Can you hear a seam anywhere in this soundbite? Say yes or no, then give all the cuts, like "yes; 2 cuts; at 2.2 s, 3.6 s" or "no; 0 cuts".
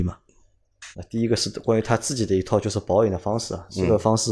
yes; 1 cut; at 0.9 s